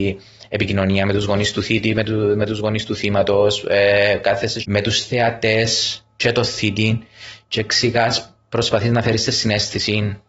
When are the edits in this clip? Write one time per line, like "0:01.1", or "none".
0:04.6